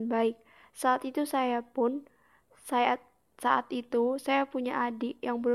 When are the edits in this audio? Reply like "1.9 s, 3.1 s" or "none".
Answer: none